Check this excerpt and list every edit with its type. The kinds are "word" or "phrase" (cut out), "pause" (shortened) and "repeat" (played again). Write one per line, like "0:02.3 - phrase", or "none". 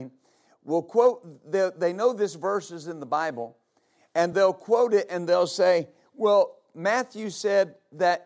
none